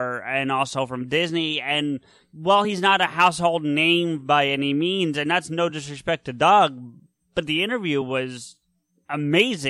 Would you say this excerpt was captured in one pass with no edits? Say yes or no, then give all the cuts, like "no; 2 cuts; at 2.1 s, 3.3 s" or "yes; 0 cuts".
yes; 0 cuts